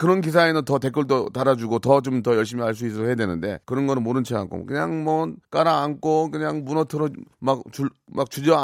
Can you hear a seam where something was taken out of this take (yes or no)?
yes